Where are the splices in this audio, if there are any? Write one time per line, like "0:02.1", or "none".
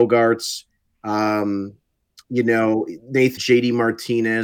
0:03.4